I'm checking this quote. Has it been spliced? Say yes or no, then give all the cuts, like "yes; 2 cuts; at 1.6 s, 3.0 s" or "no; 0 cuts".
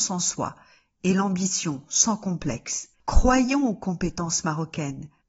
yes; 1 cut; at 2.9 s